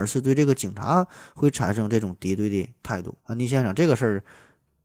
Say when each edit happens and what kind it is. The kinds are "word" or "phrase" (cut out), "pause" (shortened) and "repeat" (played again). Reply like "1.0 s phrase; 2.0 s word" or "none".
3.2 s pause